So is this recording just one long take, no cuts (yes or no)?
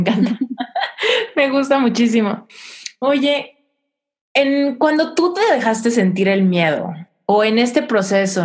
yes